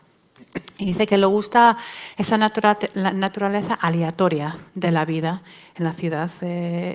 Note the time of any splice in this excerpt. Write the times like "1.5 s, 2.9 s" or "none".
none

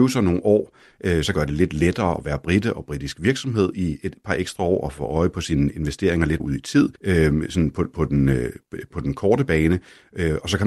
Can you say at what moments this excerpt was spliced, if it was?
1.3 s, 6.4 s, 7.0 s, 8.9 s

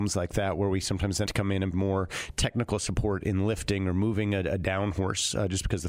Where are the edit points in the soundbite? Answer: 1.2 s, 1.7 s

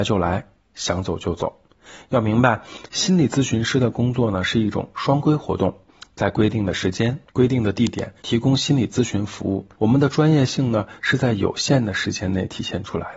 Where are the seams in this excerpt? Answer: 7.3 s, 8.2 s, 9.7 s

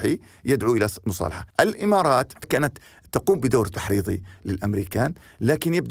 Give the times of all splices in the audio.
1.5 s, 2.4 s

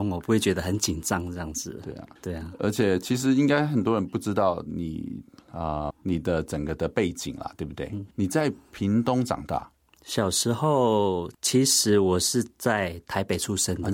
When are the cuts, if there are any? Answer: 2.2 s, 5.9 s, 8.1 s, 9.9 s, 11.3 s

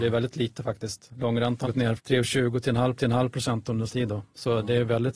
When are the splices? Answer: 1.6 s, 2.0 s, 3.0 s, 3.9 s

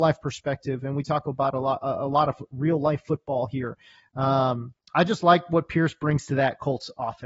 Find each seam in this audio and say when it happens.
none

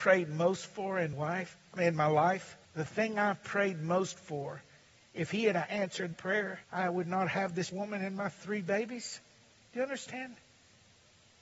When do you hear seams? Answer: 1.1 s, 2.6 s, 4.9 s, 6.1 s, 6.6 s, 7.7 s

